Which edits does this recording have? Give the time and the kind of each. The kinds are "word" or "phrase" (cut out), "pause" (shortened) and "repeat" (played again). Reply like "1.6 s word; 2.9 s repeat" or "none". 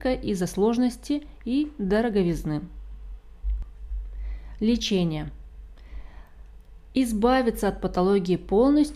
none